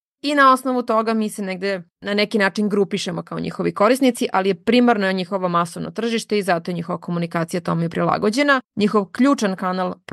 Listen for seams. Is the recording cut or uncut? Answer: cut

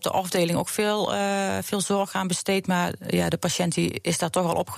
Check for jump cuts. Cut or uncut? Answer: uncut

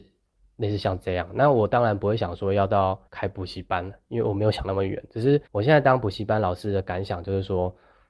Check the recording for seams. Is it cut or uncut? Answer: cut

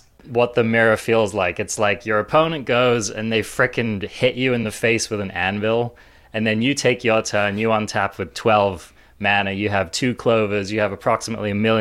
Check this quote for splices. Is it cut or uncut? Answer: uncut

